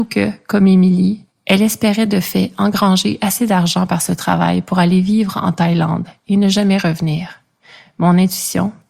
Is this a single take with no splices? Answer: yes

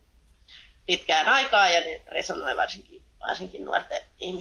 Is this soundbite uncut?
yes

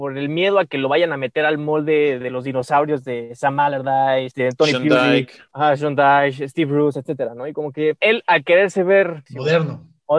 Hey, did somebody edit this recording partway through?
no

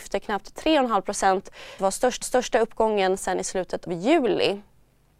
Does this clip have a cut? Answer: yes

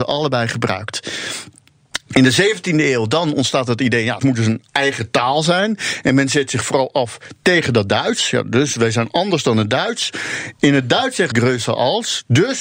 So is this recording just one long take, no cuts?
no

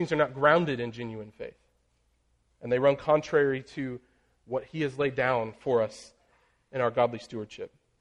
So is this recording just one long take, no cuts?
yes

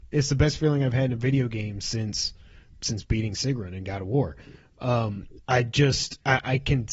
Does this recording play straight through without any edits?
yes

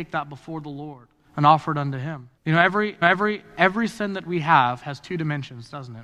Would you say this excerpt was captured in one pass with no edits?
no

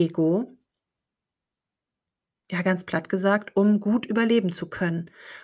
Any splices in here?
no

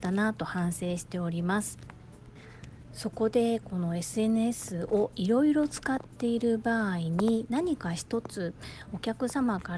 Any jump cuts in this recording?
no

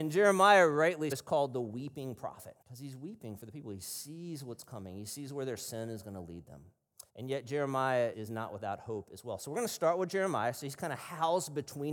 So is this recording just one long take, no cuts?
no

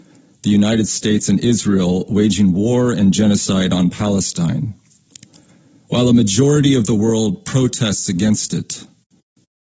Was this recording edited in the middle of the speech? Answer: no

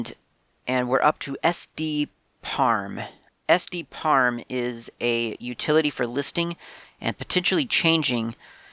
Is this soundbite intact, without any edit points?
yes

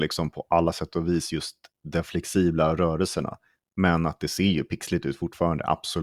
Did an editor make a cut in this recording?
no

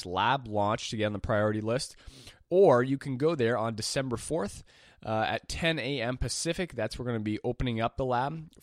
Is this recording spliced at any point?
no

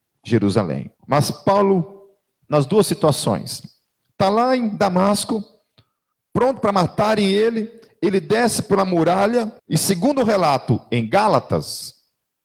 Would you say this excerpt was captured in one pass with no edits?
no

